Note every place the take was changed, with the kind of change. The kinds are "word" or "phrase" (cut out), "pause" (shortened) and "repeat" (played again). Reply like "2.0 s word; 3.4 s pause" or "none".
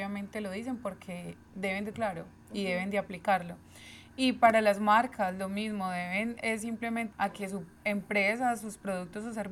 1.9 s word; 7.1 s word